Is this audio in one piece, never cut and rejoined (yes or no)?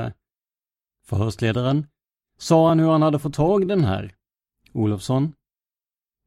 yes